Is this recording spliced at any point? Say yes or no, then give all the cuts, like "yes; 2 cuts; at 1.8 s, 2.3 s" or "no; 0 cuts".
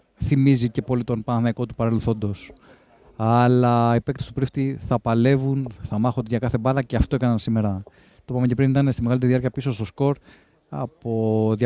no; 0 cuts